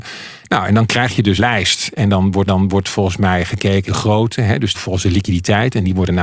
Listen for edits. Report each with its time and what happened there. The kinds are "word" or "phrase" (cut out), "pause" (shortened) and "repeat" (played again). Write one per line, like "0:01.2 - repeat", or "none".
0:01.4 - word
0:02.5 - repeat
0:03.9 - phrase
0:04.7 - phrase